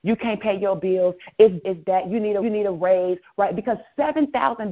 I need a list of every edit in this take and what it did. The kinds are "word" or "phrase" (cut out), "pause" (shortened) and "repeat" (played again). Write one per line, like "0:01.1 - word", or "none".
0:01.6 - word
0:02.4 - repeat